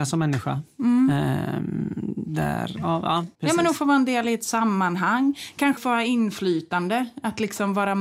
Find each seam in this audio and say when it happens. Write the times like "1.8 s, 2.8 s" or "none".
3.3 s, 5.8 s